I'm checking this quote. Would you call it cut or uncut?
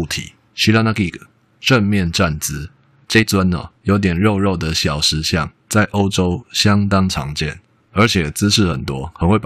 uncut